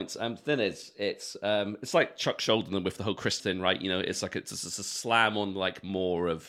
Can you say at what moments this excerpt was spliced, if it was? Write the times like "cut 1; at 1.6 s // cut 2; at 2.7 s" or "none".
cut 1; at 3.4 s